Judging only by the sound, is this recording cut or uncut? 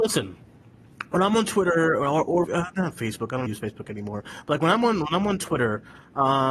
cut